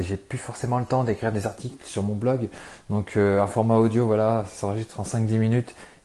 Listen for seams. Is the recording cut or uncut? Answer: uncut